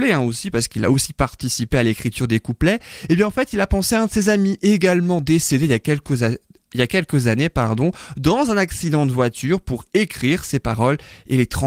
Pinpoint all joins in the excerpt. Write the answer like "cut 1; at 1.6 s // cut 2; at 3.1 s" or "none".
none